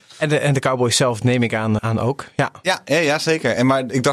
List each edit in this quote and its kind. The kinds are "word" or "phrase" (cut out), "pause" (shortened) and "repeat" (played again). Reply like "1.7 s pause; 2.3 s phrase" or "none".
1.8 s word